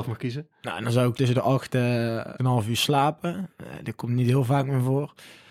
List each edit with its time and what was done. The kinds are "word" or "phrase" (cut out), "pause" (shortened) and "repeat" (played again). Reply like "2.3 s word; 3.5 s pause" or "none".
1.1 s phrase; 2.4 s phrase